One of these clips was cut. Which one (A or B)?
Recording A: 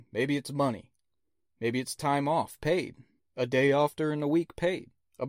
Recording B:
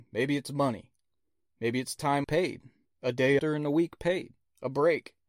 B